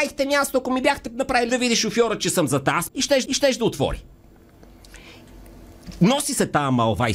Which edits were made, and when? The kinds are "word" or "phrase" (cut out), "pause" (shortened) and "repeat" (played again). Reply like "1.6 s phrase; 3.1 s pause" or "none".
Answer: 1.5 s phrase; 2.9 s word; 3.3 s repeat

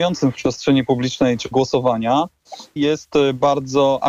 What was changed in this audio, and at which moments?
1.5 s word; 2.8 s word

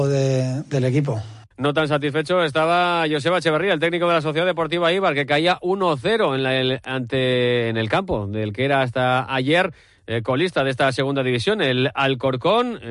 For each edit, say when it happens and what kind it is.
1.5 s pause

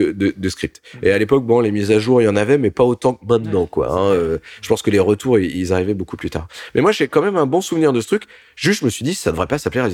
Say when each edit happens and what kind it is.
none

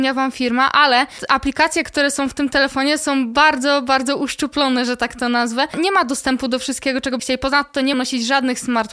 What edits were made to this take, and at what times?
7.2 s word; 7.9 s word

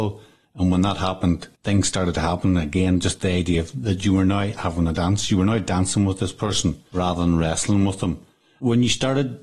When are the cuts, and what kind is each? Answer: 1.6 s pause

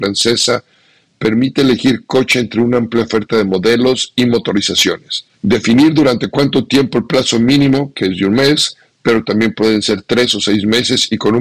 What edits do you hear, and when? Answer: 5.3 s pause

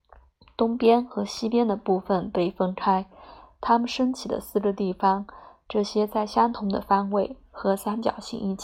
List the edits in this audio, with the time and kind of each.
none

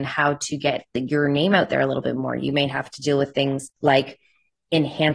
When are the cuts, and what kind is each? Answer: none

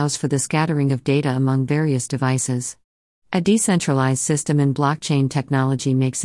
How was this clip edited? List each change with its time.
none

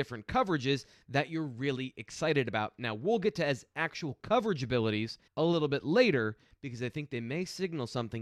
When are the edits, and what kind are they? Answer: 5.3 s pause

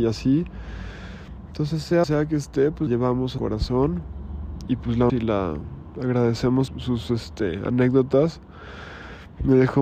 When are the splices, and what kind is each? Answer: 2.0 s word; 2.9 s word; 3.4 s word; 4.7 s word; 5.1 s word; 6.7 s word

